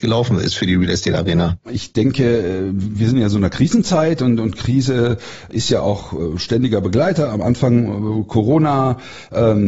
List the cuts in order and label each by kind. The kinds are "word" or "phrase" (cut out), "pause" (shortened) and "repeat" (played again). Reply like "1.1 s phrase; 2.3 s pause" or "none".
none